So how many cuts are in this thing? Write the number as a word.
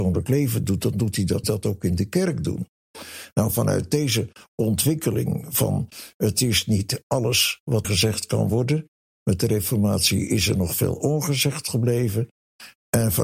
two